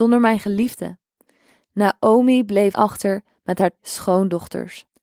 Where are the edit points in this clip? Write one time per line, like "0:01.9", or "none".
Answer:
0:02.7
0:03.8